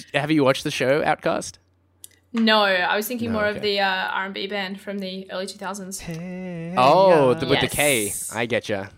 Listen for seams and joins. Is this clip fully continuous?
yes; 0 cuts

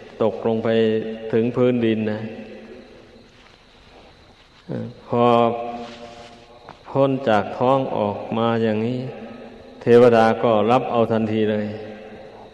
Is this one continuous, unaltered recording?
no; 1 cut; at 6.8 s

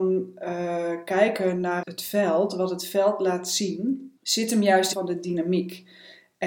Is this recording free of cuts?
no; 3 cuts; at 1.8 s, 4.2 s, 4.9 s

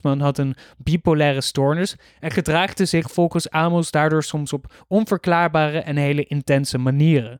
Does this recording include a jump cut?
no; 0 cuts

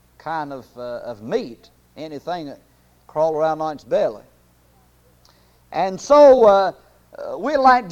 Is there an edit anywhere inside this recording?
no; 0 cuts

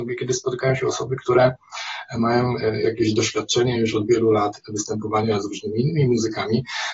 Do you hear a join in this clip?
no; 0 cuts

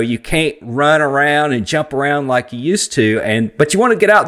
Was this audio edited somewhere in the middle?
no; 0 cuts

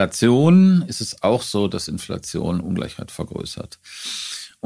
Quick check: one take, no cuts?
yes; 0 cuts

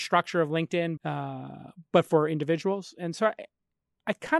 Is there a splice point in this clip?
yes; 1 cut; at 1.0 s

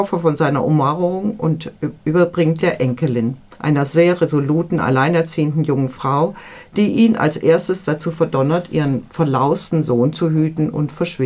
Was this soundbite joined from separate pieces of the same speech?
yes; 2 cuts; at 2.6 s, 3.5 s

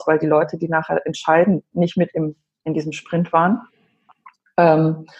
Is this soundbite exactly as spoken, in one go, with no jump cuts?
yes; 0 cuts

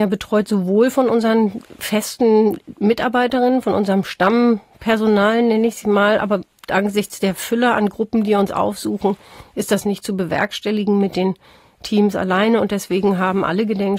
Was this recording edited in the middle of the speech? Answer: no; 0 cuts

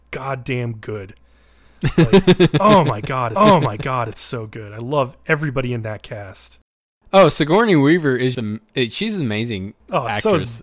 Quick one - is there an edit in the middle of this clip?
yes; 2 cuts; at 3.3 s, 8.3 s

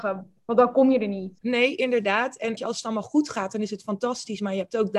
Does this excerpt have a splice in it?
yes; 2 cuts; at 1.4 s, 2.6 s

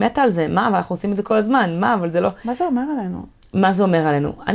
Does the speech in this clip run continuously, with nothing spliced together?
yes; 0 cuts

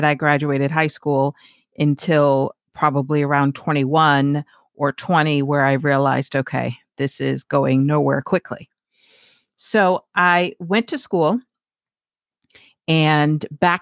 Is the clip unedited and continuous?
yes; 0 cuts

